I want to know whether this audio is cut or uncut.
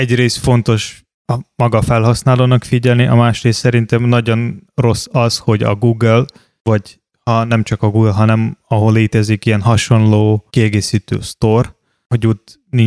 cut